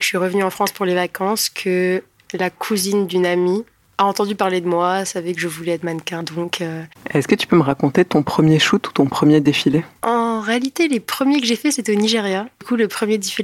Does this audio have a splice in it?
no; 0 cuts

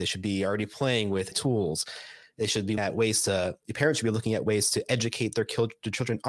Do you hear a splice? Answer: yes; 2 cuts; at 1.3 s, 2.8 s

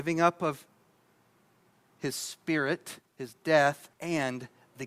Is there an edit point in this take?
yes; 1 cut; at 3.9 s

